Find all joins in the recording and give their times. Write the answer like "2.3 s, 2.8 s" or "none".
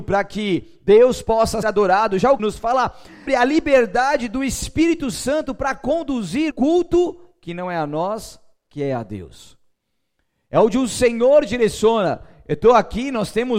1.6 s, 2.4 s, 3.3 s, 6.5 s